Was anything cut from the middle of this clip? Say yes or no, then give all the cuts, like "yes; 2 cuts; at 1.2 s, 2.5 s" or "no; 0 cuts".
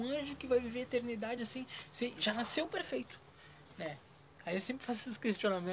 no; 0 cuts